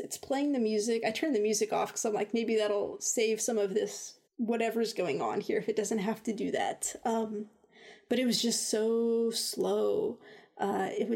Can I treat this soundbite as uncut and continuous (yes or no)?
no